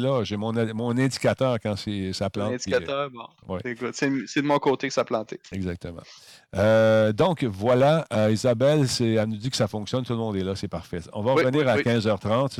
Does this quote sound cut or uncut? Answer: uncut